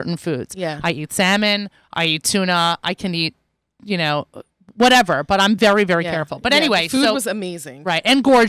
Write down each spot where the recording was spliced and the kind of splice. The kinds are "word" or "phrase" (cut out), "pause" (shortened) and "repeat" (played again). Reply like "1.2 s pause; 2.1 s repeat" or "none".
none